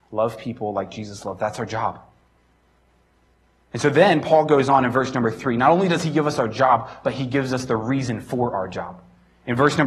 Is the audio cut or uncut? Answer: uncut